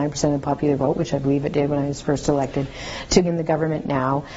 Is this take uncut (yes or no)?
no